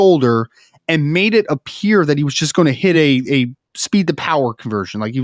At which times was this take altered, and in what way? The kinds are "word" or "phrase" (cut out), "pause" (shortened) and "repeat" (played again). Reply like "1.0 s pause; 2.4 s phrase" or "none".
none